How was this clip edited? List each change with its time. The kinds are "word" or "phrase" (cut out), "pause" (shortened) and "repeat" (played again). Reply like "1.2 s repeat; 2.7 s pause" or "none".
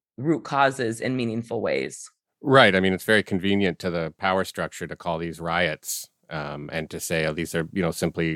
none